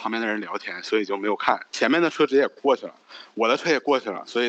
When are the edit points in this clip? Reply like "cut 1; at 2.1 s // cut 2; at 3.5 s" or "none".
none